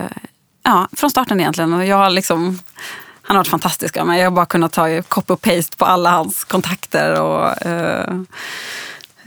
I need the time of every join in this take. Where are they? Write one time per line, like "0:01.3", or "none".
none